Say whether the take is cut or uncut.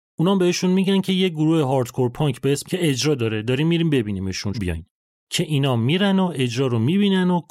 cut